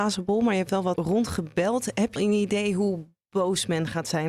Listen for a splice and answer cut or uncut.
cut